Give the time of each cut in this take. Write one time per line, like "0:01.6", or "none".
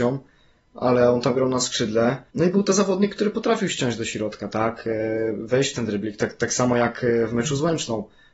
0:02.3